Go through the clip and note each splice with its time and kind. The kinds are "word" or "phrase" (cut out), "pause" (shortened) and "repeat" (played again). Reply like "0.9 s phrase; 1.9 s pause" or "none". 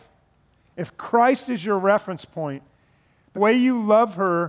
3.4 s word